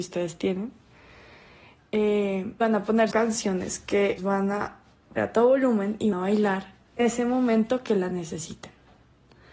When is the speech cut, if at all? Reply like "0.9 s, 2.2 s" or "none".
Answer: 2.6 s, 3.1 s, 4.2 s, 5.2 s, 6.1 s, 7.0 s